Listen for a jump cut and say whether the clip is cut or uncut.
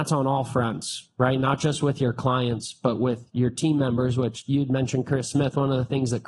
uncut